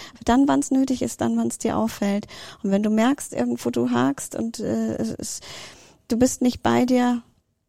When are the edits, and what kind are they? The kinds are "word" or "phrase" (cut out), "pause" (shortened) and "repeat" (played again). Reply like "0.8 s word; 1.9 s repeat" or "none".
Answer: none